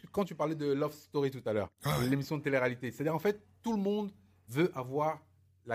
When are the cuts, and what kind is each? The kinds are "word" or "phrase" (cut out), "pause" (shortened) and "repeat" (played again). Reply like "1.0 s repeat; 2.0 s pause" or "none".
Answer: none